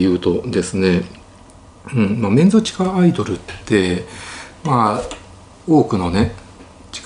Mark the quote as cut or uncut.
uncut